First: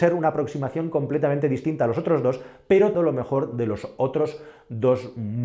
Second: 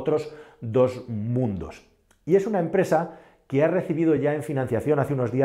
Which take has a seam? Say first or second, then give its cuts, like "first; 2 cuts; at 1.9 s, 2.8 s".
first; 1 cut; at 2.9 s